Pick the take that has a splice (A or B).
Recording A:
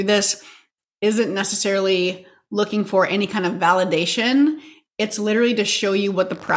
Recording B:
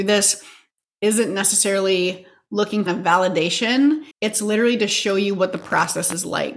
B